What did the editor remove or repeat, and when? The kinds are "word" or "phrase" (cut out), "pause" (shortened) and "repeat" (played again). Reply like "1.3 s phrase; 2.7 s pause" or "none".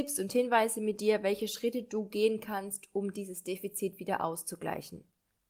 none